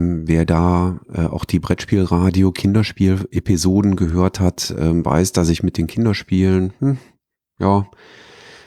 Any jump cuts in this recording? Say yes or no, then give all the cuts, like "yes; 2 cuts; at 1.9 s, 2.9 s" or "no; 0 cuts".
no; 0 cuts